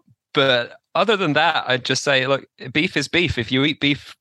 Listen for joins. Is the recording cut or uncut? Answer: uncut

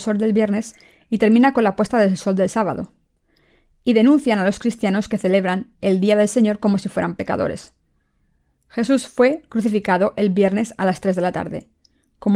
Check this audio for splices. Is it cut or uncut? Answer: uncut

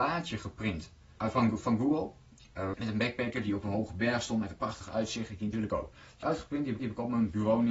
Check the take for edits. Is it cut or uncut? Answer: cut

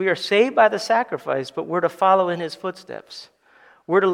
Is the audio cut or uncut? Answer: uncut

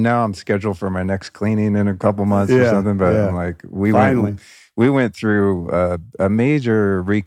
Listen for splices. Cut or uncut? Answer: uncut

